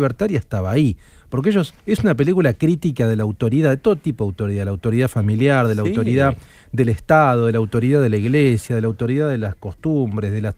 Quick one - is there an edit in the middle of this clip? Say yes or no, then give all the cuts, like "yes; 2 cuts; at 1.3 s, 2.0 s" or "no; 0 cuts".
yes; 1 cut; at 1.8 s